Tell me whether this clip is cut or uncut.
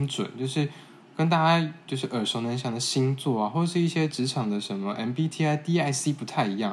uncut